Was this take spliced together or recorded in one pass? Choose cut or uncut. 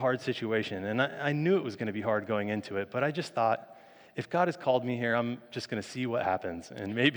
uncut